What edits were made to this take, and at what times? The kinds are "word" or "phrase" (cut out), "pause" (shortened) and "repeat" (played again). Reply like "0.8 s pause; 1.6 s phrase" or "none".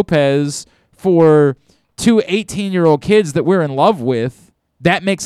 none